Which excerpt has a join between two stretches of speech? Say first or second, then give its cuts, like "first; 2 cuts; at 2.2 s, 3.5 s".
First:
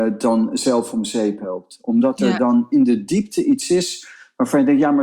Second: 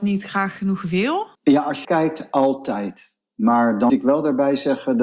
second; 3 cuts; at 1.3 s, 1.8 s, 3.9 s